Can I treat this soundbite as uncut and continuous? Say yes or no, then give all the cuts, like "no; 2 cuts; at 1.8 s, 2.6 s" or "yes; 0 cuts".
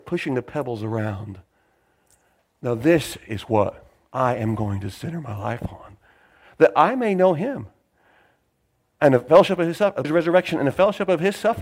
no; 1 cut; at 10.0 s